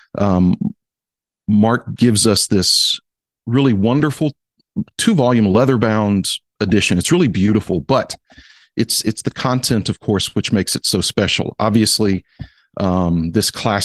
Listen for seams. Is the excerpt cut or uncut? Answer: uncut